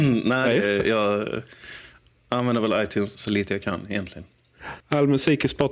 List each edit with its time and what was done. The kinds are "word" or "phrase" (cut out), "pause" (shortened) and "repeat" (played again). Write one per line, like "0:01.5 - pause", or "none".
0:03.1 - word
0:04.8 - pause